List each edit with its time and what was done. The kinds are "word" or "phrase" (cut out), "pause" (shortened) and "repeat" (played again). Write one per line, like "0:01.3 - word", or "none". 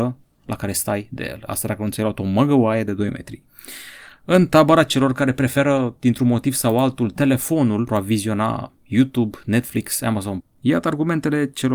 0:03.5 - pause
0:07.9 - word
0:10.4 - phrase